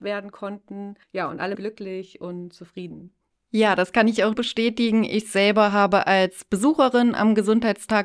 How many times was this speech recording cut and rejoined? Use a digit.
3